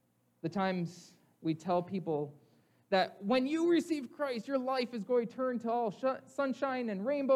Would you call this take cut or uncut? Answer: uncut